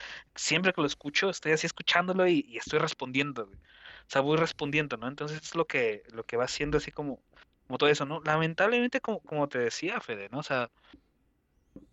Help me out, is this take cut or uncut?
uncut